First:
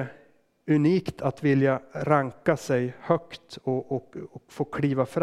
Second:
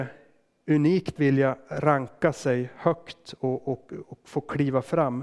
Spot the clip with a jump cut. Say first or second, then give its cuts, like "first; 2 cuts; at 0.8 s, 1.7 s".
second; 1 cut; at 1.2 s